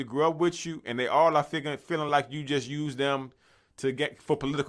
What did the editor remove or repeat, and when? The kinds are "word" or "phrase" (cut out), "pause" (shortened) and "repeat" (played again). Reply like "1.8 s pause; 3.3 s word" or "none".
none